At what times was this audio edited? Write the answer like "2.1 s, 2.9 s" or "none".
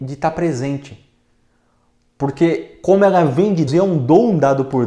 3.7 s